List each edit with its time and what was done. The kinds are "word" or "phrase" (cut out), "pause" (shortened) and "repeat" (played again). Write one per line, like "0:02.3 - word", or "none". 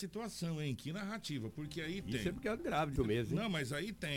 0:02.6 - word
0:02.9 - word